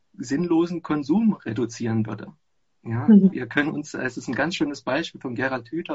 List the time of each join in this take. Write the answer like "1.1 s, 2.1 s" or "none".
none